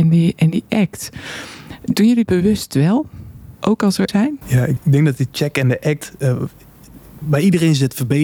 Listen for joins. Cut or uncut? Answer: cut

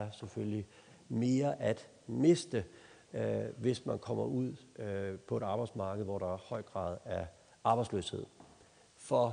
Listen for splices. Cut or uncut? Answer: uncut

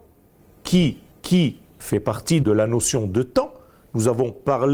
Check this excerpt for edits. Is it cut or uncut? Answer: cut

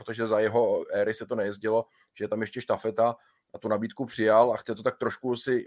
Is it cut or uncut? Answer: uncut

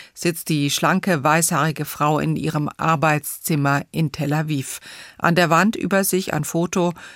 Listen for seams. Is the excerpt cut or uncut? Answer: uncut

